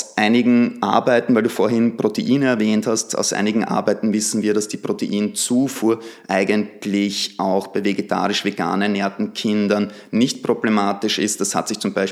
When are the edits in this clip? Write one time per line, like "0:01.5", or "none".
none